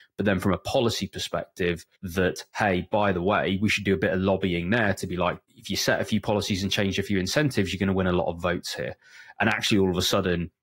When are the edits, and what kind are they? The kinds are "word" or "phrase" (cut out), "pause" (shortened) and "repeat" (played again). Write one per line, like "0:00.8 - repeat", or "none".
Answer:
0:01.9 - pause
0:05.4 - pause